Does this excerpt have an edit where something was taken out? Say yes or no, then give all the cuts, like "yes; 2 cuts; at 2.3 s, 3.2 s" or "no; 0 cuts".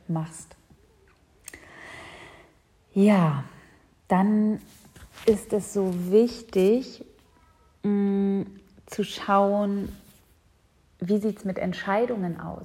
no; 0 cuts